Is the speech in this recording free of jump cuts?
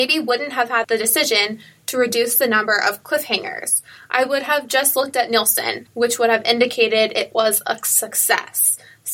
no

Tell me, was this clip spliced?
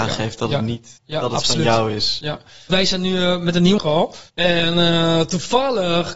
yes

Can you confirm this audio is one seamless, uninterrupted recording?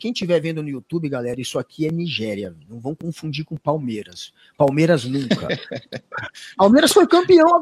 yes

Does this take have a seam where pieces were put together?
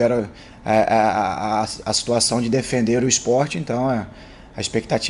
no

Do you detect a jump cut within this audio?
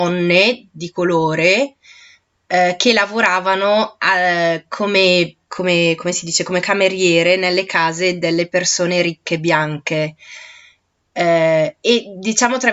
no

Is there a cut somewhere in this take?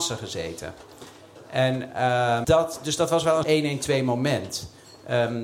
yes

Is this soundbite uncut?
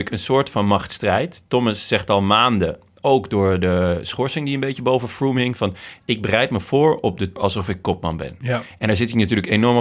no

